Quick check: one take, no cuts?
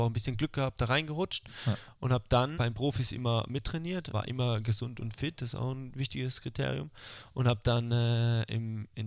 no; 2 cuts; at 2.5 s, 4.1 s

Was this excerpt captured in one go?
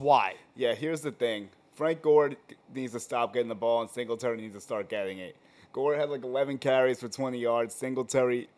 yes; 0 cuts

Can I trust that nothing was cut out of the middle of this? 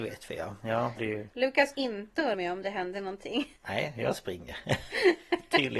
no; 4 cuts; at 1.0 s, 1.7 s, 2.3 s, 3.6 s

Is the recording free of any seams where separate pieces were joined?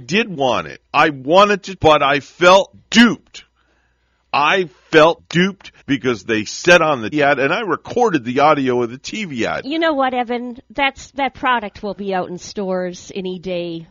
no; 6 cuts; at 1.8 s, 2.7 s, 5.2 s, 5.8 s, 7.1 s, 12.0 s

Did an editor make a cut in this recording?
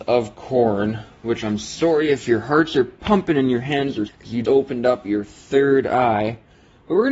yes; 2 cuts; at 4.1 s, 4.4 s

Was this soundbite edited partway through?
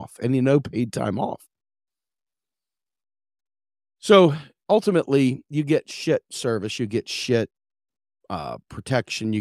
no; 0 cuts

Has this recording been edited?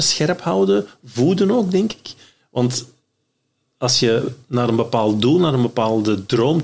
no; 0 cuts

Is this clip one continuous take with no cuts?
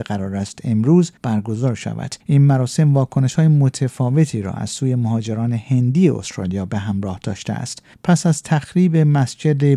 no; 3 cuts; at 1.2 s, 2.2 s, 7.9 s

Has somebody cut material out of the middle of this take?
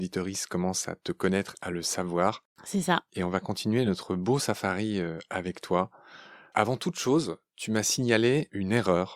no; 0 cuts

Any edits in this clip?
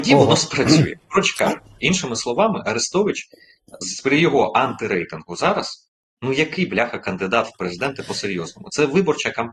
no; 0 cuts

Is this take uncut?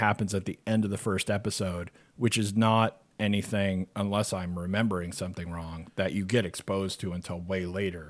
no; 1 cut; at 2.0 s

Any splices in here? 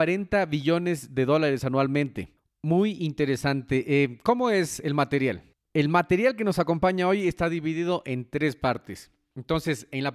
no; 0 cuts

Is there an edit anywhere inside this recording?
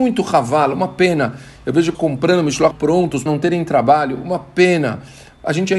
yes; 3 cuts; at 1.9 s, 2.7 s, 3.3 s

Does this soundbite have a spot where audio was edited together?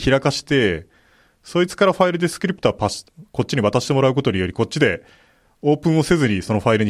no; 0 cuts

